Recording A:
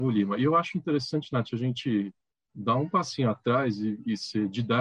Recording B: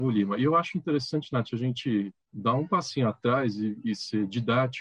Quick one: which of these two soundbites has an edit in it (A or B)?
B